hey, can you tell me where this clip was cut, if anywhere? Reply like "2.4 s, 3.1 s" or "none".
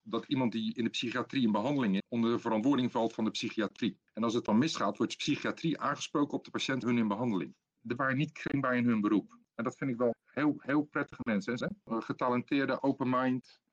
2.0 s, 6.8 s, 8.0 s, 10.1 s, 11.6 s, 12.8 s